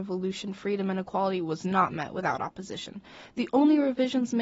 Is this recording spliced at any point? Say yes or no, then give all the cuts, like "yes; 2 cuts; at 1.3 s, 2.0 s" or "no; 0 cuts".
no; 0 cuts